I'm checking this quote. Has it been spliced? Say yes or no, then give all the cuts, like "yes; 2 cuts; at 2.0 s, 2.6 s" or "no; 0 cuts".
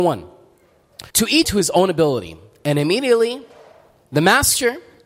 yes; 2 cuts; at 1.1 s, 1.4 s